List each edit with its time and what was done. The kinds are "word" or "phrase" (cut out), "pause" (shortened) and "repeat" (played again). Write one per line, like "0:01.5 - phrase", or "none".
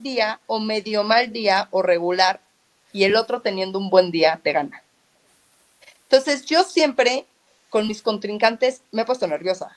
none

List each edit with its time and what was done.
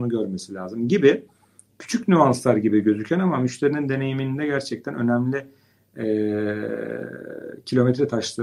none

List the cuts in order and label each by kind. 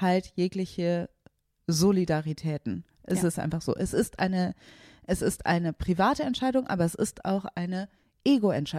none

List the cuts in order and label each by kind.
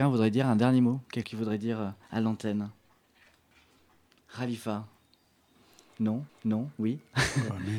0:01.2 - word
0:02.0 - pause
0:06.3 - repeat

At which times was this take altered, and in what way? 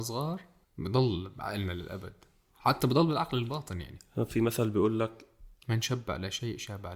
none

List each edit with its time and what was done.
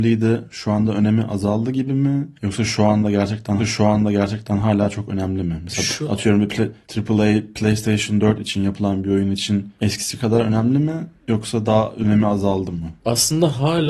0:03.6 - repeat

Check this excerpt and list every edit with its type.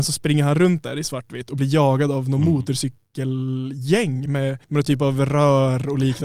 0:04.3 - word
0:04.6 - pause

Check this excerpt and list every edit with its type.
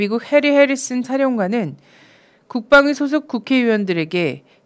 0:01.0 - word

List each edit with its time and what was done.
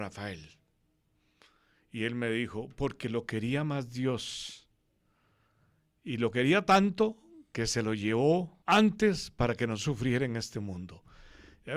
0:08.6 - pause

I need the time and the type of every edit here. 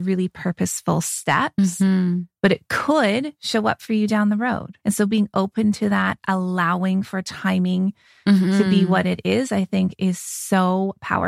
none

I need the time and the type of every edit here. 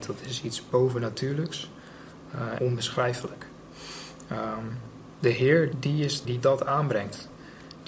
0:02.6 - word
0:05.2 - word
0:05.7 - word
0:06.2 - word

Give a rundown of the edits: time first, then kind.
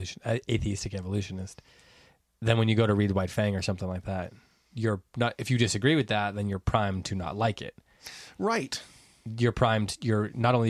none

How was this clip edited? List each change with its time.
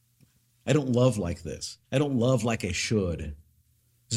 0:01.8 - pause

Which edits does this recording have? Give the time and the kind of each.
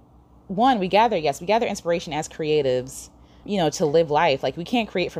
0:03.4 - word

